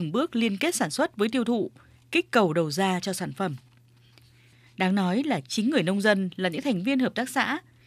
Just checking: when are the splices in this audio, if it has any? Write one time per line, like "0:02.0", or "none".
none